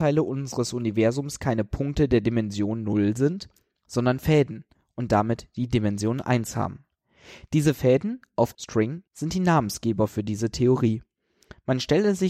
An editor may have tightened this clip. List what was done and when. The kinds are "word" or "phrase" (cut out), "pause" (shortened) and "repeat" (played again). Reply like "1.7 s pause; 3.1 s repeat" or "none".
8.5 s word; 9.1 s pause